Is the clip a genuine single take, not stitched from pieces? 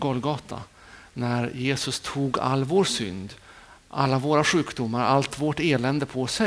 yes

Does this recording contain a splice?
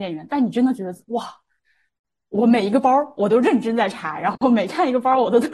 no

